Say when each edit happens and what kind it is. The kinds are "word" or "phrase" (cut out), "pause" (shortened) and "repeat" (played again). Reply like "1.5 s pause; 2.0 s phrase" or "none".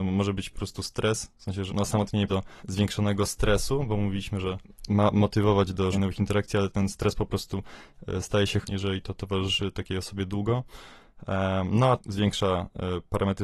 1.3 s pause; 1.7 s word; 2.3 s word; 2.6 s pause; 5.9 s word; 8.6 s word; 12.0 s word

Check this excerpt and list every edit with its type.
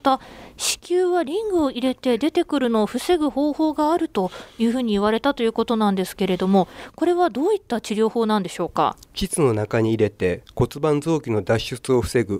9.0 s pause

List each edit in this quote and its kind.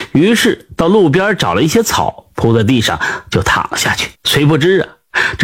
4.1 s pause

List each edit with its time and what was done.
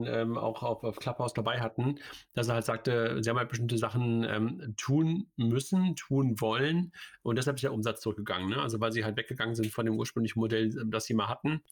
none

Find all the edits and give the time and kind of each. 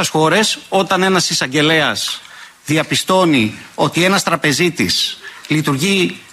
none

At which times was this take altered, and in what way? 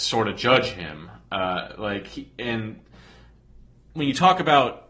none

